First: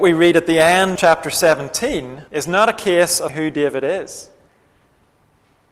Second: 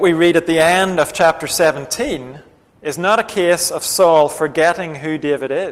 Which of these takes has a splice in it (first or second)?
first